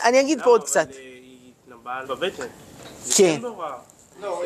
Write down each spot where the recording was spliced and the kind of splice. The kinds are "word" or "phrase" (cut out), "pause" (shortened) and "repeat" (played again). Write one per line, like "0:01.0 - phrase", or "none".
0:02.0 - phrase